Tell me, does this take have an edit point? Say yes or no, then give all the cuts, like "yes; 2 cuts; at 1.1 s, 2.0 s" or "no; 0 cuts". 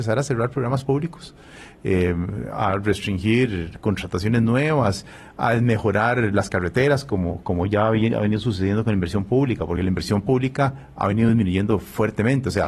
no; 0 cuts